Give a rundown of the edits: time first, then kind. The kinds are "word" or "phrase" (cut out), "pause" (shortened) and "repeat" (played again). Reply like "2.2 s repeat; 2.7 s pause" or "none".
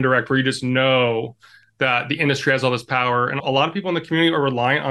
3.4 s word